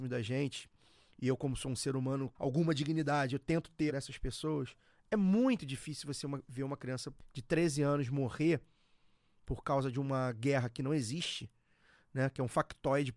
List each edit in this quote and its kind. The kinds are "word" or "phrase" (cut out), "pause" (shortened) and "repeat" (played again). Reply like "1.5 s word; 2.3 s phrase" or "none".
2.3 s phrase; 3.9 s phrase